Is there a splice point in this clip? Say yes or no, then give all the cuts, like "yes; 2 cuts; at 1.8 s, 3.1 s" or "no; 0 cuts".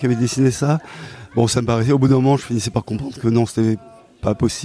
no; 0 cuts